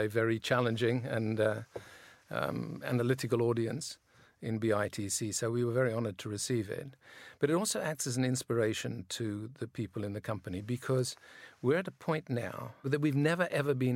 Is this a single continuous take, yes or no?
yes